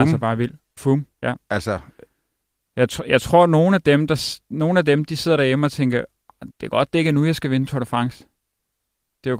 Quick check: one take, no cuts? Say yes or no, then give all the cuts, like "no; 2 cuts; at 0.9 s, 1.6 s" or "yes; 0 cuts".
no; 2 cuts; at 1.1 s, 6.5 s